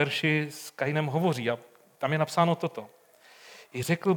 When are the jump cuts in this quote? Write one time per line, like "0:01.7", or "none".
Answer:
none